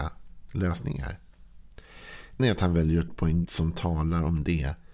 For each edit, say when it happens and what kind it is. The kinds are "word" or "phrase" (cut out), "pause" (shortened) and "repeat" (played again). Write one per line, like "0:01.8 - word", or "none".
0:02.4 - word
0:03.1 - word
0:03.4 - word